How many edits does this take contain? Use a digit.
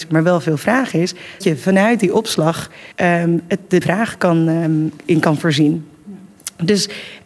4